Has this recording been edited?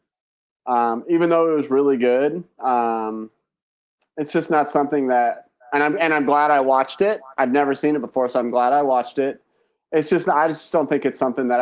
no; 0 cuts

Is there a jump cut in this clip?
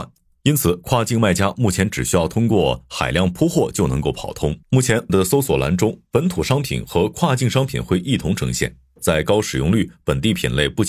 yes; 2 cuts; at 4.6 s, 5.1 s

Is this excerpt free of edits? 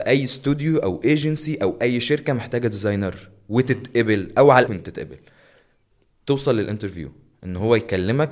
no; 1 cut; at 4.7 s

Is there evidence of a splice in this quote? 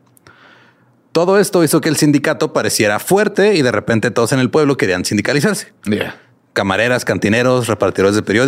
yes; 1 cut; at 5.8 s

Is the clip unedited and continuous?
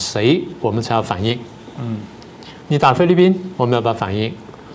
no; 1 cut; at 2.6 s

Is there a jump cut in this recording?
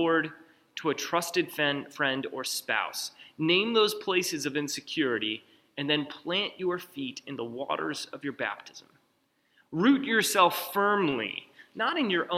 no; 0 cuts

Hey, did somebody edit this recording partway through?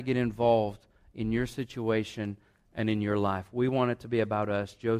no; 0 cuts

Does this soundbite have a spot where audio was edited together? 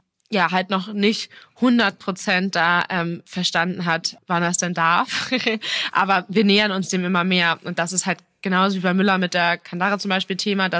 no; 0 cuts

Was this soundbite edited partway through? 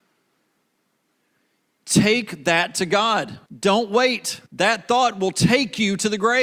yes; 2 cuts; at 3.5 s, 4.5 s

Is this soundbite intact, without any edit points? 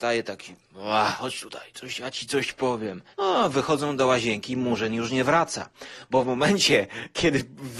no; 1 cut; at 3.1 s

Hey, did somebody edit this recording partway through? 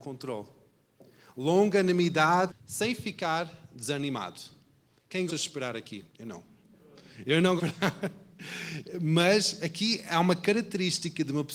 yes; 4 cuts; at 2.5 s, 5.3 s, 6.1 s, 7.6 s

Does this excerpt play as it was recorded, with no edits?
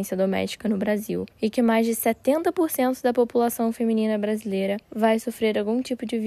no; 2 cuts; at 1.3 s, 4.8 s

